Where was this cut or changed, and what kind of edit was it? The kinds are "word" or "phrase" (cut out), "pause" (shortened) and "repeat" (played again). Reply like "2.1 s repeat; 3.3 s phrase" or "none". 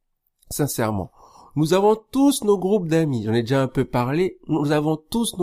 none